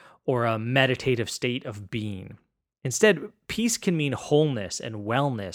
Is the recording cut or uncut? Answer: uncut